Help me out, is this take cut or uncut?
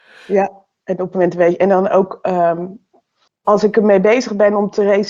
cut